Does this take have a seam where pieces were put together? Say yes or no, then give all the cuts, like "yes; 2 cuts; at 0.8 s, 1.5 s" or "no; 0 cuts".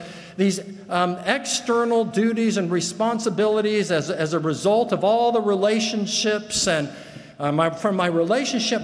no; 0 cuts